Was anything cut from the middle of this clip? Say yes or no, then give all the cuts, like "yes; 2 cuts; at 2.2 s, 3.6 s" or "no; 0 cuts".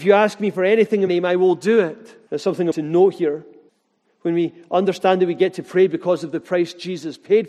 yes; 4 cuts; at 1.1 s, 2.3 s, 2.7 s, 3.7 s